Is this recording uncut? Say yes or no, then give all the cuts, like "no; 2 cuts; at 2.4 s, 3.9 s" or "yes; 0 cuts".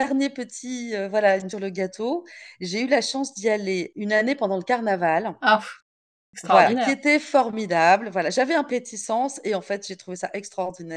no; 2 cuts; at 1.5 s, 8.7 s